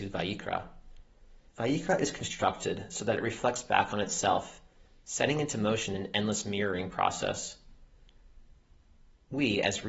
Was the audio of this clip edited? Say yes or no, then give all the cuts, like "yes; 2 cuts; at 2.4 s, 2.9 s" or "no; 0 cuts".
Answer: yes; 1 cut; at 1.5 s